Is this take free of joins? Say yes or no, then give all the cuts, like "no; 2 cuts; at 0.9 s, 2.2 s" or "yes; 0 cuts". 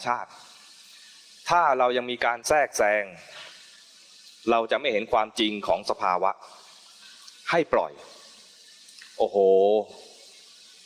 yes; 0 cuts